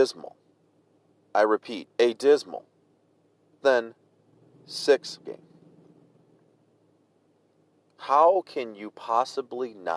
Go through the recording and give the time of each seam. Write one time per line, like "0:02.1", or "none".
0:01.9
0:03.6
0:05.2

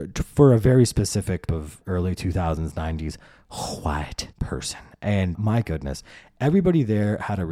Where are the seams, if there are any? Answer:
0:01.5
0:01.8
0:04.3
0:05.3

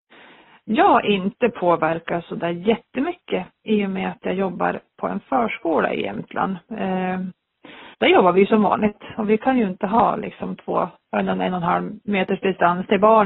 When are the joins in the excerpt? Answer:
0:07.9
0:12.0

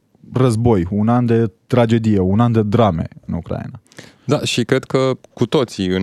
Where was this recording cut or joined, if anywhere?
0:01.6

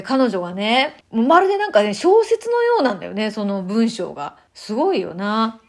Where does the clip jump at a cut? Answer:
0:01.0
0:04.5

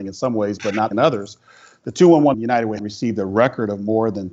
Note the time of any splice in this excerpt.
0:00.9
0:02.3
0:02.8

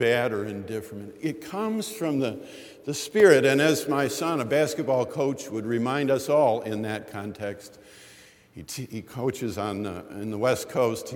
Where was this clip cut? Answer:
none

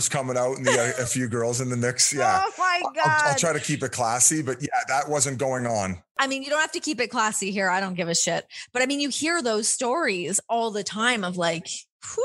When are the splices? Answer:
none

